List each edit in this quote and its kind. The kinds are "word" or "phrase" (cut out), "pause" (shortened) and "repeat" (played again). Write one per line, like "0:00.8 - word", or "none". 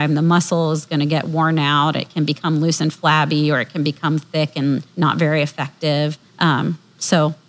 0:04.9 - pause
0:06.3 - pause